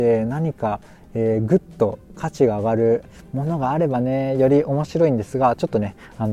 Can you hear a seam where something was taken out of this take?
no; 0 cuts

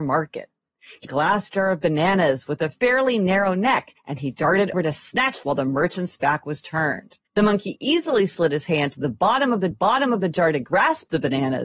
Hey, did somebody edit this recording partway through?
yes; 6 cuts; at 1.0 s, 4.0 s, 4.7 s, 5.4 s, 7.2 s, 9.7 s

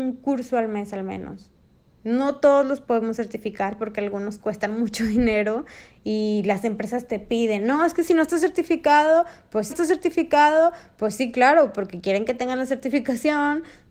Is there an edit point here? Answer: yes; 1 cut; at 9.7 s

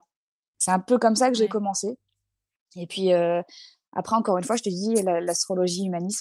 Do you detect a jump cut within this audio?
no; 0 cuts

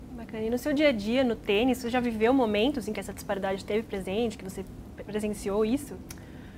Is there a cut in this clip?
no; 0 cuts

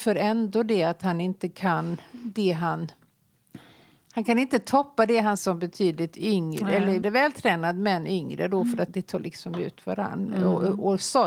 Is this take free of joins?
no; 3 cuts; at 5.4 s, 7.0 s, 8.9 s

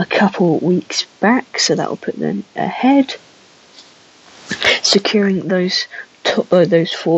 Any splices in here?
no; 0 cuts

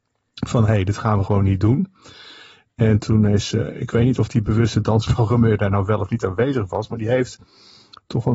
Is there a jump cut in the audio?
no; 0 cuts

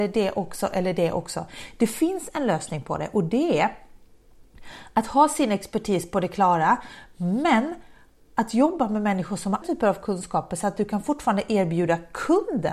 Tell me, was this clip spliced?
yes; 1 cut; at 9.6 s

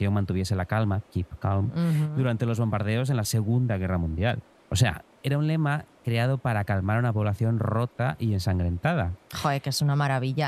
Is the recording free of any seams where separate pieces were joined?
yes; 0 cuts

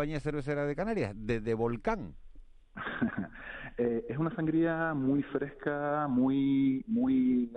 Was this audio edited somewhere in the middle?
no; 0 cuts

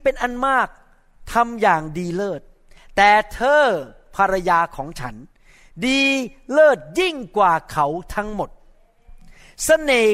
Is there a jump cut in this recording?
no; 0 cuts

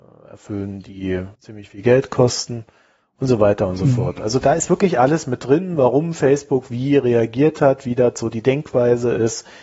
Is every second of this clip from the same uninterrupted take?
no; 1 cut; at 1.3 s

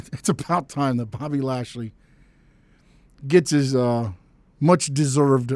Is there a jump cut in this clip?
no; 0 cuts

